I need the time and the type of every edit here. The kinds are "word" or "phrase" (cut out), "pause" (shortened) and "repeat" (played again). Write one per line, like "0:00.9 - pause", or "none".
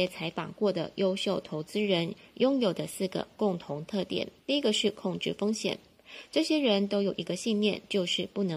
0:04.4 - pause